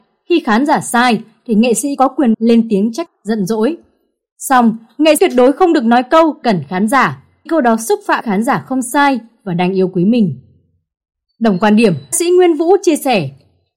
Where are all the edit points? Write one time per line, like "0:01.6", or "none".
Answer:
0:02.0
0:02.3
0:03.1
0:05.2
0:06.4
0:07.5
0:08.2
0:12.1